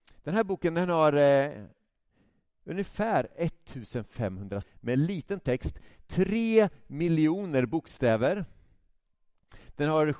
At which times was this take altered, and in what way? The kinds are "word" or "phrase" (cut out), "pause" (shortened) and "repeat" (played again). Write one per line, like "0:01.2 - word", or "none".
0:04.6 - word